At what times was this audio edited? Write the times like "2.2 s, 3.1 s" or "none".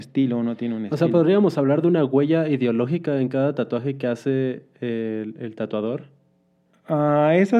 none